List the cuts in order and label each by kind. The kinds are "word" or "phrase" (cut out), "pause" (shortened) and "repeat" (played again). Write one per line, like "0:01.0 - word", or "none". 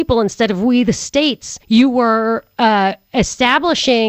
0:01.6 - pause